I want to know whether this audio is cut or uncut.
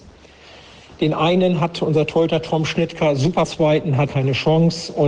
cut